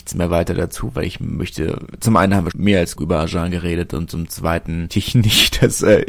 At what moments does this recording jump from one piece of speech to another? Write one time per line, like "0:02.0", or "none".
0:02.5
0:03.0
0:04.9